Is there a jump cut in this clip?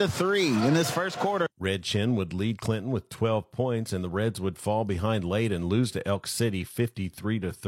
no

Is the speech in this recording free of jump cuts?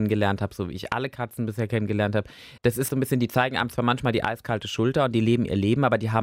no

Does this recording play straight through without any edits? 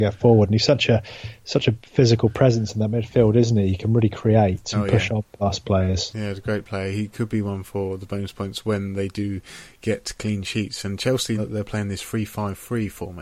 no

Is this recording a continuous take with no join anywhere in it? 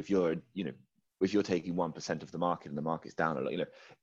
yes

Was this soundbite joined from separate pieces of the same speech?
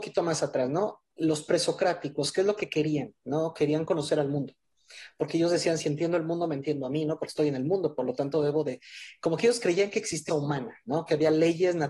yes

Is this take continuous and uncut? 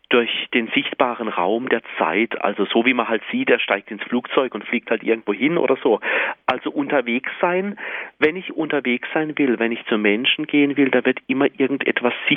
yes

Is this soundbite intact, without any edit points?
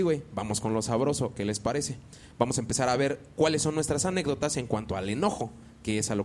yes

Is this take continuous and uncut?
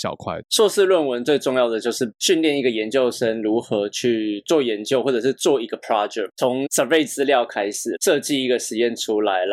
yes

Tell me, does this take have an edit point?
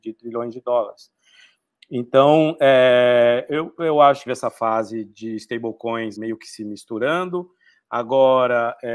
yes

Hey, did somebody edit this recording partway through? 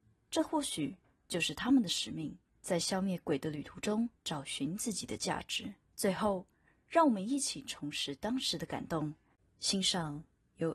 yes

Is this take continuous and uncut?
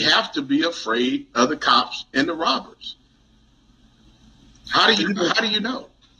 yes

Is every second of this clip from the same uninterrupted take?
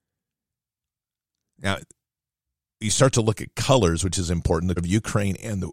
no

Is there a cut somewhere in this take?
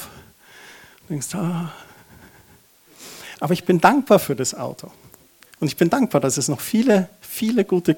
no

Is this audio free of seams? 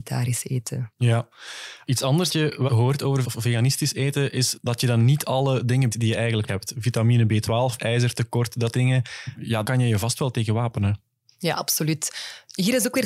no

